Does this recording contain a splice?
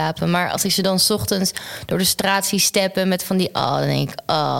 no; 0 cuts

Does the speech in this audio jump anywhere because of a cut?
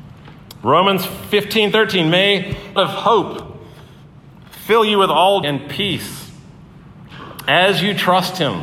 yes; 2 cuts; at 2.8 s, 5.4 s

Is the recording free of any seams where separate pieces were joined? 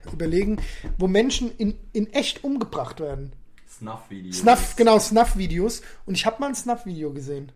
yes; 0 cuts

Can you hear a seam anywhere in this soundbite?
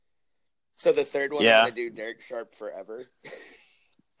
no; 0 cuts

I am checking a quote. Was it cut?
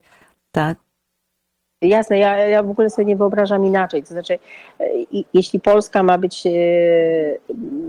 yes; 1 cut; at 5.1 s

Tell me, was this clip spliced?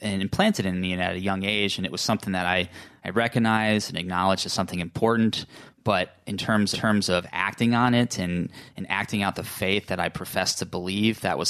yes; 1 cut; at 6.7 s

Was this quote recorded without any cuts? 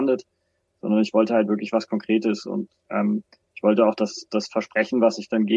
yes; 0 cuts

